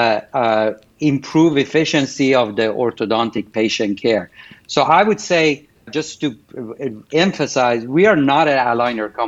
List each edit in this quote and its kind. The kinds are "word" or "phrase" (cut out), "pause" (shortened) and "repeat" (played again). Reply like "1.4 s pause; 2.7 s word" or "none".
5.9 s word

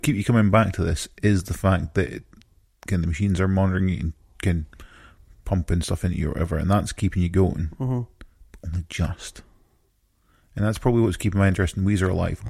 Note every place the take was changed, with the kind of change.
none

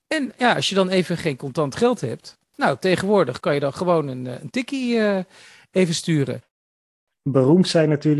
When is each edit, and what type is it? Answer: none

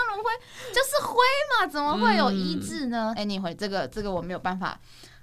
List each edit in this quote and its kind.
3.2 s phrase

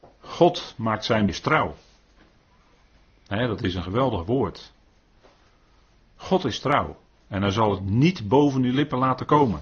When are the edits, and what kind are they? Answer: 1.3 s phrase

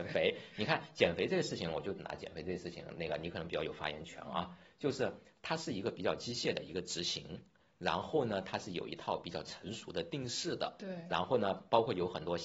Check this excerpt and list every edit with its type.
none

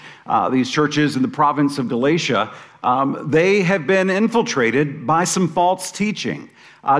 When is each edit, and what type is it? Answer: none

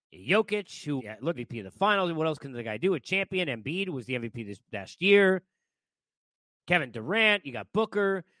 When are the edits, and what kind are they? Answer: 1.0 s word; 1.3 s word

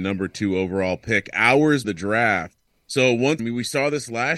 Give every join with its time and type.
1.8 s word; 2.7 s pause; 3.4 s word

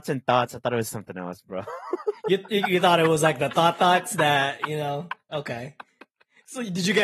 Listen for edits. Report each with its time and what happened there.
none

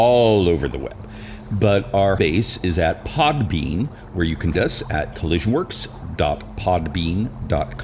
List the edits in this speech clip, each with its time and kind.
2.2 s word; 4.5 s word; 5.1 s word

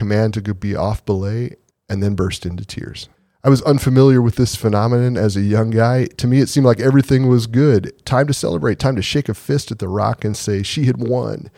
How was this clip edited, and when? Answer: 1.7 s pause; 3.1 s pause

